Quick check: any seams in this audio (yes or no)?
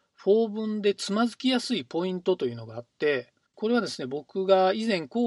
yes